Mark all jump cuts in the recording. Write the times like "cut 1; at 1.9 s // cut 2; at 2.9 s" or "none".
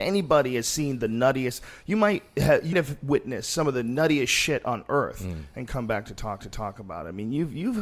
cut 1; at 2.7 s // cut 2; at 6.4 s

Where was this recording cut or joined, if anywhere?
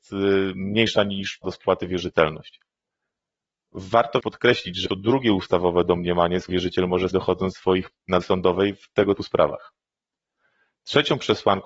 cut 1; at 1.4 s // cut 2; at 4.2 s // cut 3; at 4.9 s // cut 4; at 6.5 s // cut 5; at 7.1 s // cut 6; at 7.9 s // cut 7; at 8.2 s // cut 8; at 9.2 s

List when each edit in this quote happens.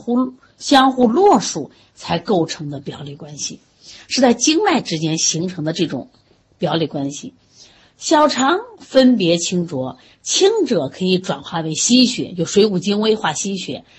none

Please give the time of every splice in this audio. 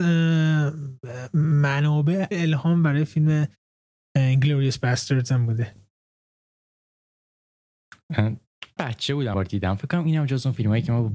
cut 1; at 2.3 s // cut 2; at 8.8 s // cut 3; at 9.3 s

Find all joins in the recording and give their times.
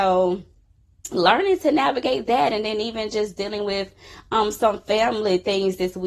none

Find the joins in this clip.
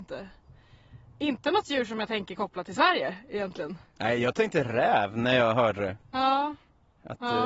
none

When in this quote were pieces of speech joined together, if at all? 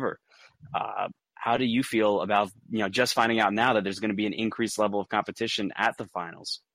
none

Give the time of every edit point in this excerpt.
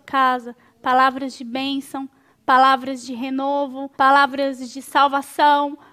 cut 1; at 3.9 s

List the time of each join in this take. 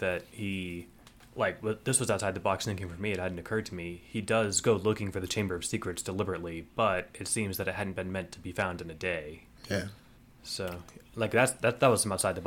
none

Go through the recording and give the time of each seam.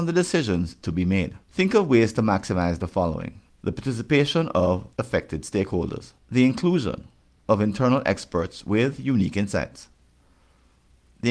cut 1; at 1.4 s // cut 2; at 3.5 s // cut 3; at 4.9 s // cut 4; at 6.2 s

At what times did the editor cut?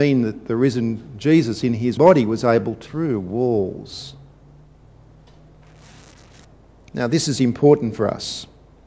cut 1; at 2.0 s // cut 2; at 2.9 s

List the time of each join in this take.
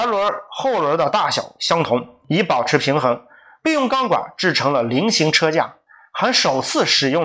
none

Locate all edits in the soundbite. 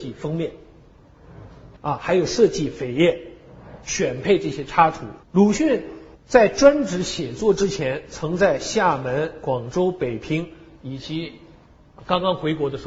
cut 1; at 1.8 s // cut 2; at 5.2 s // cut 3; at 6.1 s

